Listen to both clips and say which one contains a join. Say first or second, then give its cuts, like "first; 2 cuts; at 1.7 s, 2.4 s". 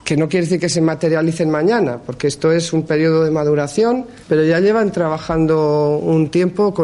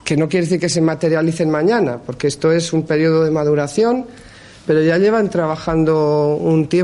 first; 1 cut; at 4.2 s